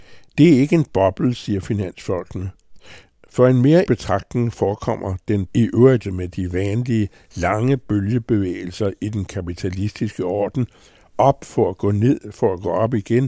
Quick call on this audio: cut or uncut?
cut